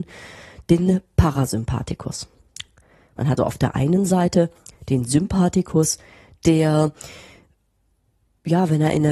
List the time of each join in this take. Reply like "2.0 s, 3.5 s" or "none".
3.4 s